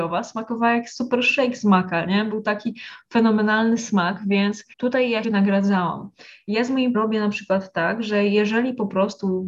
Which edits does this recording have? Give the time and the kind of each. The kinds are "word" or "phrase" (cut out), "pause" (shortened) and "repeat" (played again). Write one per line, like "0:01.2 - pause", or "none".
0:04.7 - pause
0:05.2 - word
0:06.9 - phrase